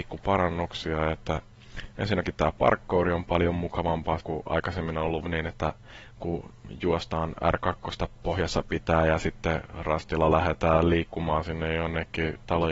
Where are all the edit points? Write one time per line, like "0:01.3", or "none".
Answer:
0:04.2